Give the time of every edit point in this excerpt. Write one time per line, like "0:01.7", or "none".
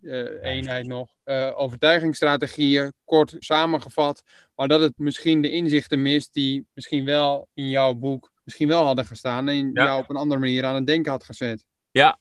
0:01.2
0:03.4
0:05.0
0:08.4